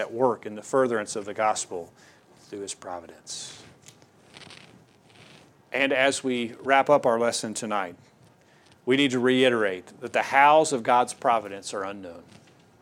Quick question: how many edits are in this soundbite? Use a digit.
0